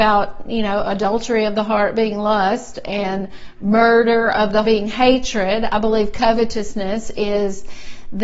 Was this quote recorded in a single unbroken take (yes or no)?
no